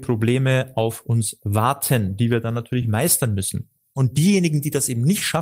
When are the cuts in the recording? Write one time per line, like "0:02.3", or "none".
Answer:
none